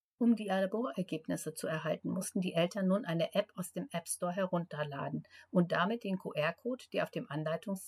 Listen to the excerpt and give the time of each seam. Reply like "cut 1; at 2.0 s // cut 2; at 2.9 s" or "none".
none